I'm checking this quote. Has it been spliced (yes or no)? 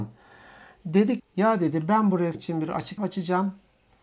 yes